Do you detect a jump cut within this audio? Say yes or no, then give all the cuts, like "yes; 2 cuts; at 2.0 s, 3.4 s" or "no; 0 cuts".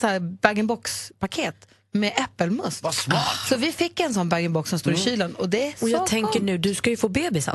no; 0 cuts